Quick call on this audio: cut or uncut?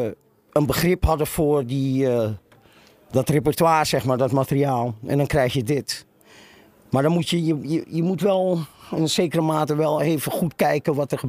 uncut